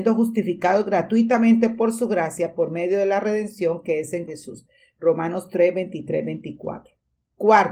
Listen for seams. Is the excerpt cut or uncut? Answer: cut